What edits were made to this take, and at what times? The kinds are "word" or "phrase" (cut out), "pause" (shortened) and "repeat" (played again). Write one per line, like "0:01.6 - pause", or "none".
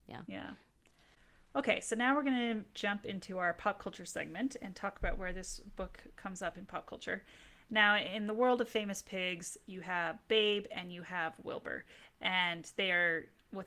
none